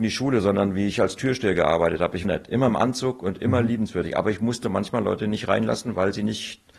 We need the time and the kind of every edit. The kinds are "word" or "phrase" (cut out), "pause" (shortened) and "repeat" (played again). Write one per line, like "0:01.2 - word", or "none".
0:02.2 - phrase

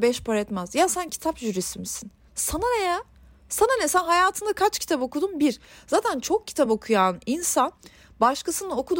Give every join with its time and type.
none

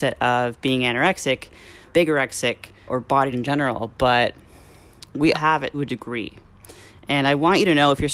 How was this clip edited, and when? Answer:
0:01.9 - word
0:02.9 - word
0:03.3 - word
0:05.3 - word
0:05.7 - word

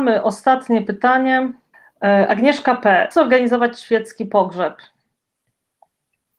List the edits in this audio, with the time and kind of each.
0:01.7 - pause
0:03.1 - word

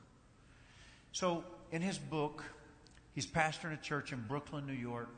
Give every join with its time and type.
none

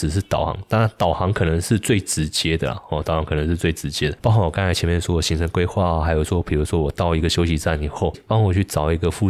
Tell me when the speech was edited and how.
0:08.1 - word

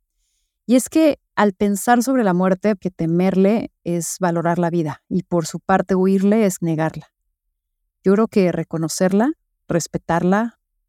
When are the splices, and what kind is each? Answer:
0:02.8 - word
0:06.6 - word

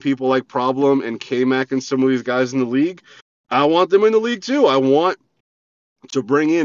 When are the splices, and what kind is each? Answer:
none

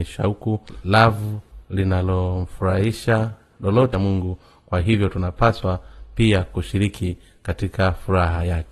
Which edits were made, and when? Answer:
0:03.9 - word

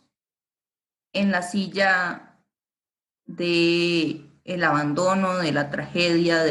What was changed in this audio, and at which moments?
none

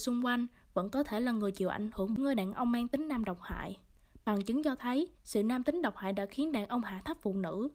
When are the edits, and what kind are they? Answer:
0:02.2 - phrase
0:05.2 - pause

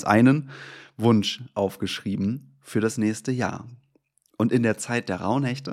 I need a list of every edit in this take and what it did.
none

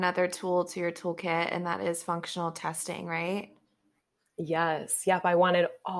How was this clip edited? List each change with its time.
none

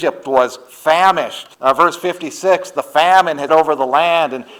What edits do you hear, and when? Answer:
0:01.5 - pause
0:03.5 - word

